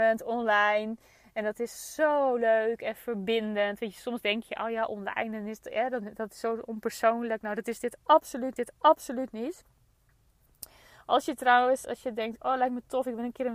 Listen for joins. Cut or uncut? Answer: cut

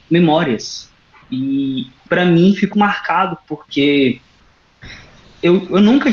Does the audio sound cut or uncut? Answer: cut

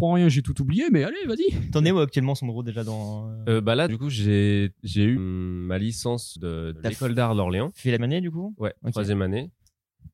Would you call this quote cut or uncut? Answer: cut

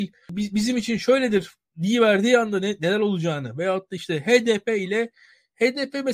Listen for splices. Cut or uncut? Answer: uncut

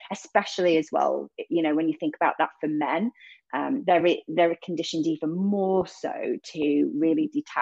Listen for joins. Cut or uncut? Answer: uncut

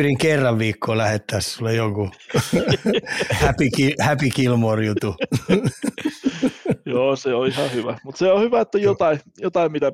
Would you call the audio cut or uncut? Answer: uncut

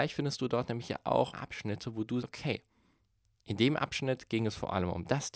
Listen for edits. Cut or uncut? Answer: cut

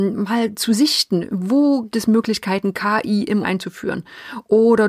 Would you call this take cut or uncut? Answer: cut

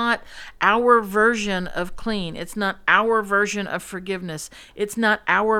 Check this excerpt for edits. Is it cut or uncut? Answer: uncut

